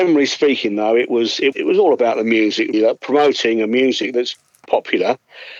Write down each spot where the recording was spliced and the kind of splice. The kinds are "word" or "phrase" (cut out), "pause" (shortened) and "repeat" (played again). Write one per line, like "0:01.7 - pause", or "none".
0:01.5 - word
0:02.7 - word
0:04.7 - word

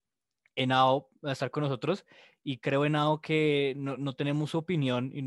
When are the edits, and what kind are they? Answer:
none

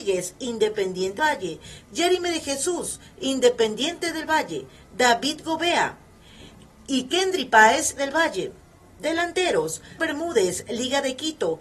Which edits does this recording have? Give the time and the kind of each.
0:01.2 - word
0:08.0 - word
0:10.0 - word

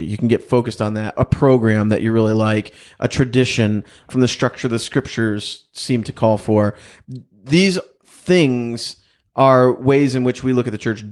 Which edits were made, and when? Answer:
0:04.1 - phrase

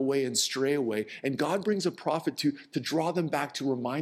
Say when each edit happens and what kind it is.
none

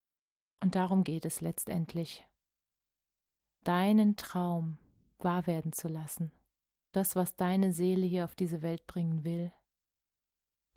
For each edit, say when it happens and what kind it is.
0:03.6 - word
0:06.9 - word

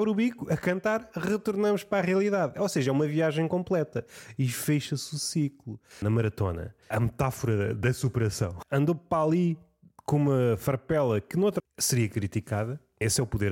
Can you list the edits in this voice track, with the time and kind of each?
0:06.8 - pause
0:11.6 - word

